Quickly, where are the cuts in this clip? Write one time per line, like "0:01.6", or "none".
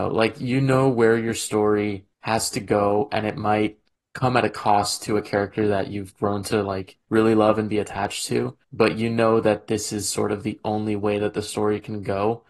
0:02.1
0:03.9
0:07.0
0:08.6